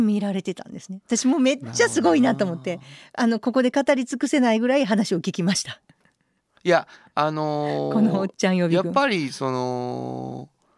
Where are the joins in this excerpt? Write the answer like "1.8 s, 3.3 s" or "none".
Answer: none